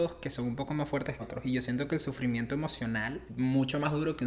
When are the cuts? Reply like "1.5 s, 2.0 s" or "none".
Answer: 1.2 s, 3.3 s